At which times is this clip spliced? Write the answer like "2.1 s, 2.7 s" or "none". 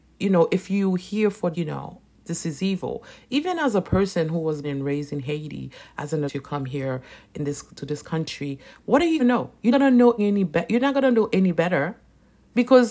1.5 s, 4.6 s, 6.3 s, 7.8 s, 9.2 s, 9.7 s, 10.2 s